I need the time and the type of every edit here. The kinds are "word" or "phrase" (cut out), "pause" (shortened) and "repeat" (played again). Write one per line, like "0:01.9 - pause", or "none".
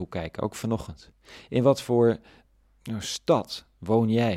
none